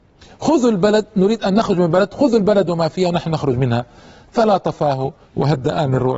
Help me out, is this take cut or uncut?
uncut